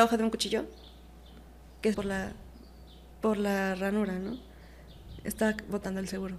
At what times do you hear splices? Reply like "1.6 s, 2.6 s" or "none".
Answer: 1.9 s